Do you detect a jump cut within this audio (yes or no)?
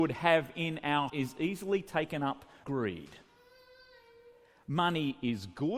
yes